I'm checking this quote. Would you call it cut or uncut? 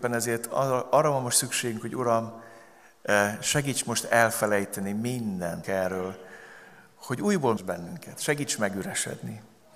cut